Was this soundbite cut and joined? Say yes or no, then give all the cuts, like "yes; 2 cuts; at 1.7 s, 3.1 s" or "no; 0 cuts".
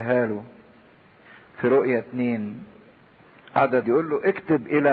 yes; 1 cut; at 3.8 s